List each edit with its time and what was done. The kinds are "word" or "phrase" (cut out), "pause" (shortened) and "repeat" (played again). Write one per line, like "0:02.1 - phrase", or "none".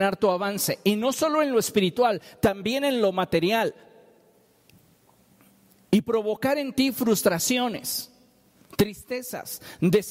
none